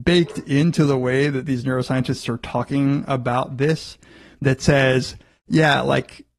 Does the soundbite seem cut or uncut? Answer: uncut